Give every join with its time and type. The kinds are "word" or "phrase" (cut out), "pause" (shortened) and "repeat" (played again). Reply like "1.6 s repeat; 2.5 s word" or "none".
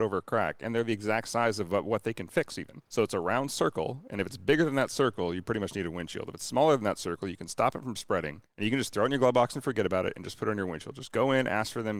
2.9 s pause; 8.5 s pause